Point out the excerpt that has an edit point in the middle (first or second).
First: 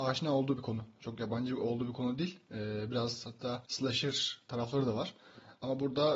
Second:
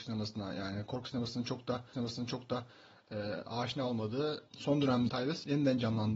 second